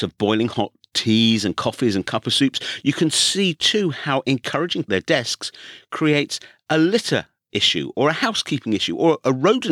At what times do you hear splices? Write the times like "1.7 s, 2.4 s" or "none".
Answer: 4.9 s